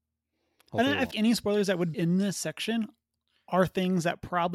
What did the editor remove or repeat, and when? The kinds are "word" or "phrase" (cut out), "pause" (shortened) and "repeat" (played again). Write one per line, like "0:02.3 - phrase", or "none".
0:01.1 - word
0:01.9 - word